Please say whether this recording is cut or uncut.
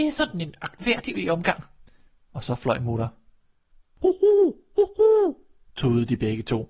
cut